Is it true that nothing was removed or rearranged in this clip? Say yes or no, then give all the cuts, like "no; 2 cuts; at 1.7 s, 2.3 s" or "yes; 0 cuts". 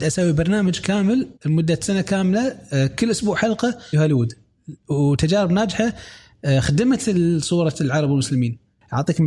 no; 2 cuts; at 1.4 s, 3.9 s